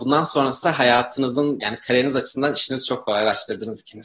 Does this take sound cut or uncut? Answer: uncut